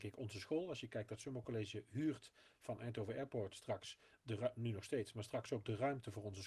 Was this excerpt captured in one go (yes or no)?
yes